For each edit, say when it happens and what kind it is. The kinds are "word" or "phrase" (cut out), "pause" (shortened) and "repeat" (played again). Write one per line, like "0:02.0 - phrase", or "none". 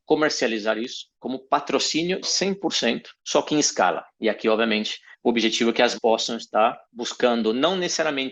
0:01.1 - pause
0:02.2 - word
0:03.2 - pause
0:04.1 - pause
0:05.1 - pause
0:05.9 - word
0:06.8 - pause